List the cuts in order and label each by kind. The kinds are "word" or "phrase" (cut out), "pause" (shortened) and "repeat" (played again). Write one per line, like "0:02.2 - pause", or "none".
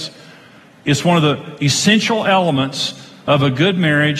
none